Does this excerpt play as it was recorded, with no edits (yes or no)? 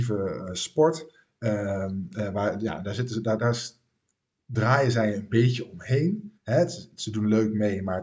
no